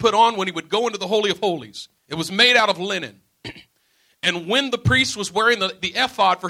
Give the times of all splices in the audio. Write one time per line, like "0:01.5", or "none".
0:02.0